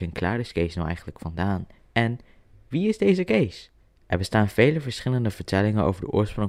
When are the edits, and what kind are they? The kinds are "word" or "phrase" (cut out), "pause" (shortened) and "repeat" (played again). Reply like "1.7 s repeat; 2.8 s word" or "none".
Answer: none